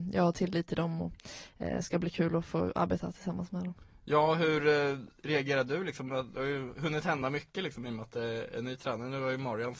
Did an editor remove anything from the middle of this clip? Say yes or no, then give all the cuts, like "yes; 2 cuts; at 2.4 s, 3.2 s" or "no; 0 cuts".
no; 0 cuts